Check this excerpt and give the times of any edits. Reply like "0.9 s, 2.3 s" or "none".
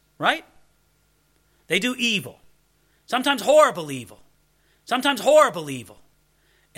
4.7 s